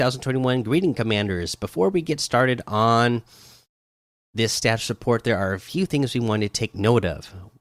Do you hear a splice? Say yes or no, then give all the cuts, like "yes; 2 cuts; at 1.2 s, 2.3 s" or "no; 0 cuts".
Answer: no; 0 cuts